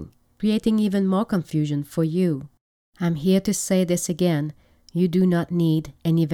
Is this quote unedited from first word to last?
yes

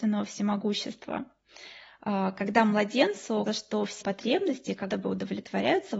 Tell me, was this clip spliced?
yes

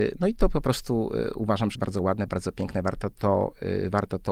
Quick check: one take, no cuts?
no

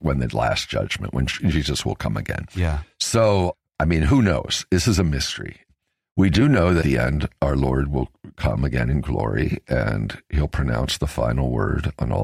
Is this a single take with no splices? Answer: no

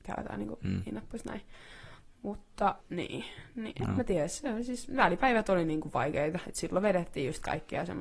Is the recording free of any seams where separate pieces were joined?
no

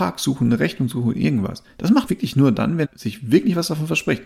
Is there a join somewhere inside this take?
yes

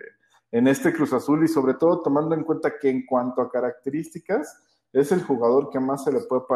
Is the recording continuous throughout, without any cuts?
yes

